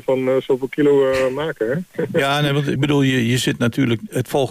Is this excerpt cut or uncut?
cut